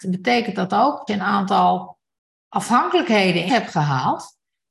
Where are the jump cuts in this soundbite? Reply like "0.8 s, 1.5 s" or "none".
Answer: 1.1 s, 3.5 s